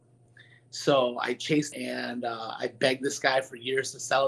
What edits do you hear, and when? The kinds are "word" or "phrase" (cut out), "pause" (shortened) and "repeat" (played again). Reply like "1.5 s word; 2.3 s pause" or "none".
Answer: 1.7 s phrase